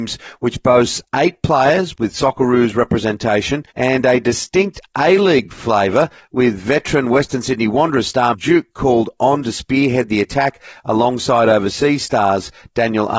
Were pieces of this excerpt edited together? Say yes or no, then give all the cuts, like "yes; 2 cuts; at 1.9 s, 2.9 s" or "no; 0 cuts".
yes; 2 cuts; at 3.7 s, 8.3 s